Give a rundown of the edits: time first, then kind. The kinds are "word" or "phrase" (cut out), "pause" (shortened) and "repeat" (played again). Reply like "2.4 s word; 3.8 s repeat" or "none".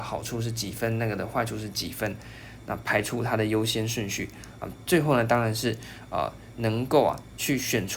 none

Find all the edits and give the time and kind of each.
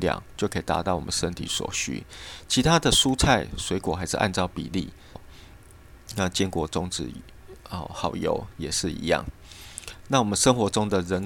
5.2 s word

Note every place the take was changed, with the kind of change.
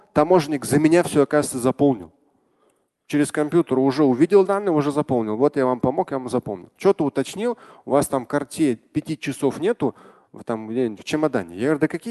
none

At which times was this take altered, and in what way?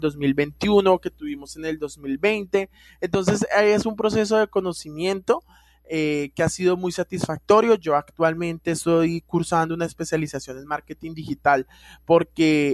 none

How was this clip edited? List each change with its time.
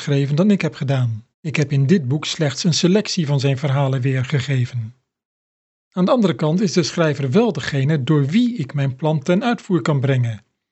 1.3 s pause; 5.2 s pause

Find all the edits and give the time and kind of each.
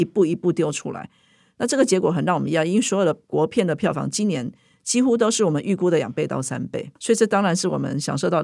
7.0 s pause

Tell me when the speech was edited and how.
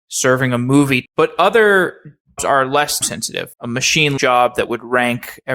1.0 s word; 2.4 s word; 3.0 s word; 3.5 s word; 4.2 s word

